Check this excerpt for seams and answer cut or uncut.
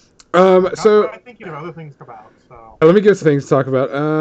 cut